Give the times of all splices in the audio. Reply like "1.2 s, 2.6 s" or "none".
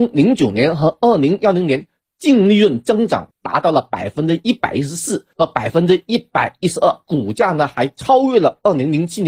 3.3 s